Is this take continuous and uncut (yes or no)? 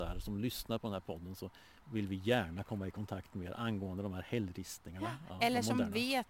yes